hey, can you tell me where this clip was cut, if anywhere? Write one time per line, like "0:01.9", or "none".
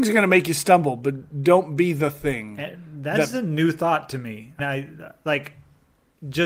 0:04.6